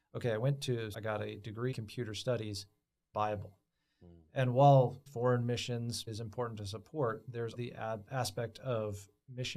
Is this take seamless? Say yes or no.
no